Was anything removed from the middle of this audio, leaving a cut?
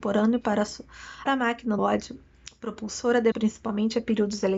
yes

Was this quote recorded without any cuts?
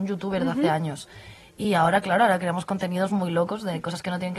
yes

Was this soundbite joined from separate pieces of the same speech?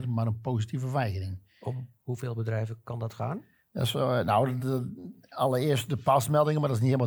no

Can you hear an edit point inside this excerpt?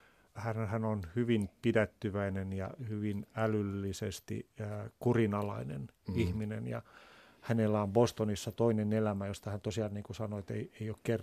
no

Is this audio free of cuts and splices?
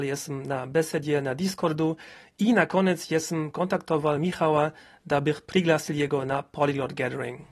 yes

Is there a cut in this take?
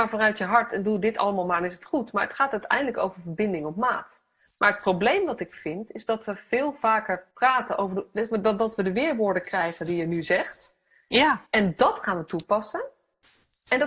yes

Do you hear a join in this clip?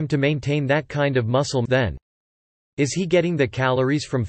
yes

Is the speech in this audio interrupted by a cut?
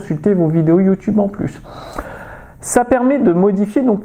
no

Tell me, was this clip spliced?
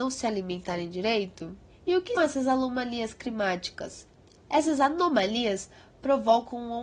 yes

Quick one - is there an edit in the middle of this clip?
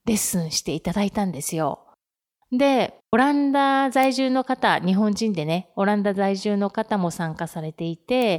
yes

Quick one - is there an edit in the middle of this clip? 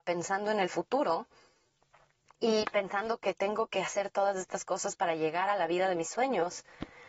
no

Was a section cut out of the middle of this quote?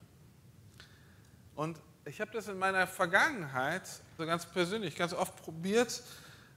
yes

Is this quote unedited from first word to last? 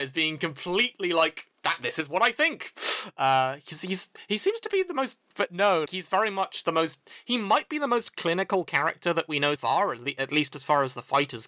no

